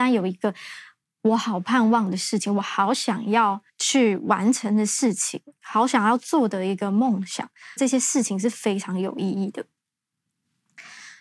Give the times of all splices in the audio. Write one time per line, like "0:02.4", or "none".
0:03.7
0:07.8